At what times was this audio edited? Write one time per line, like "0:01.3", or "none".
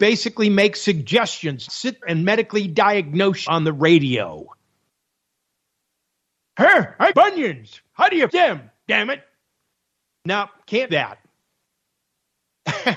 0:01.7
0:02.0
0:03.5
0:07.1
0:08.3
0:10.9